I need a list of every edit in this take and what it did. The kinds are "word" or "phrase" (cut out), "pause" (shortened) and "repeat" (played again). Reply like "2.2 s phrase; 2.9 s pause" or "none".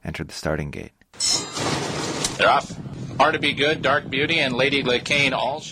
none